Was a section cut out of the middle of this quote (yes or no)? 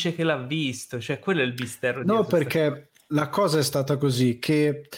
no